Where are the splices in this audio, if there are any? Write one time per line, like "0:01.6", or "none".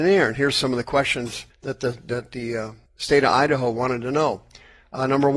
0:01.5
0:02.9